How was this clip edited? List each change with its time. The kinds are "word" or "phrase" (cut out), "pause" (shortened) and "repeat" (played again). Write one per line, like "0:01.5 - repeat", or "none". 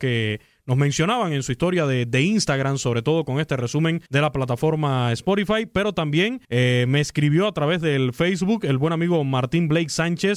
0:04.1 - pause
0:06.4 - pause